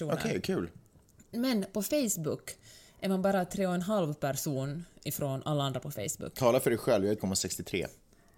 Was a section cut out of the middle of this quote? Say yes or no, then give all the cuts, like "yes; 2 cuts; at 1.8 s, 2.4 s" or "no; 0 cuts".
yes; 1 cut; at 7.2 s